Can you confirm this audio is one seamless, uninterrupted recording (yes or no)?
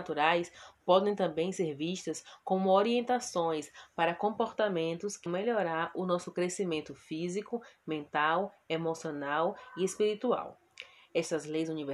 no